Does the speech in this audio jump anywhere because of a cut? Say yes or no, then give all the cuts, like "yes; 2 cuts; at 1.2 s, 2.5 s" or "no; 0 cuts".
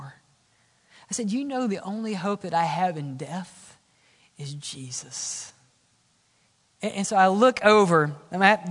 no; 0 cuts